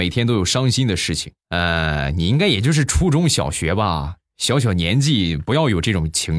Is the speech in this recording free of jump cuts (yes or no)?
no